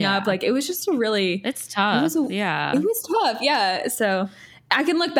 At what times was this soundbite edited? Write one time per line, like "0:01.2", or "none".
none